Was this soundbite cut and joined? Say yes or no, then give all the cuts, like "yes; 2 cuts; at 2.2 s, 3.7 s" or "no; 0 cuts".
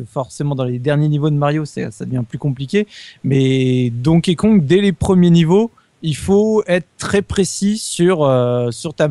no; 0 cuts